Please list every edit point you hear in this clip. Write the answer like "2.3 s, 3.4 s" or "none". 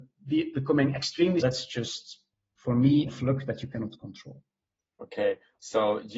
1.4 s, 3.1 s